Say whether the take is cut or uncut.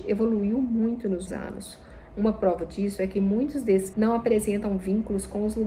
cut